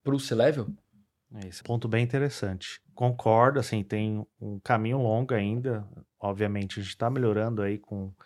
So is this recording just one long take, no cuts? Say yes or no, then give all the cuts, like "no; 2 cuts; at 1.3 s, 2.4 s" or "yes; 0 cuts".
no; 2 cuts; at 1.6 s, 2.8 s